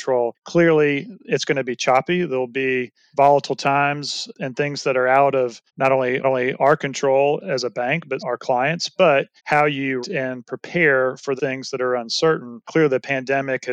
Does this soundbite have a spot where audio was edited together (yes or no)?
yes